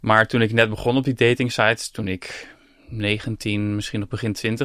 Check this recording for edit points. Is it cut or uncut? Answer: uncut